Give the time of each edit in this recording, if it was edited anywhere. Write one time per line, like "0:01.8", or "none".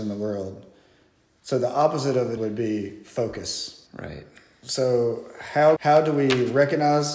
0:02.4
0:03.9
0:05.8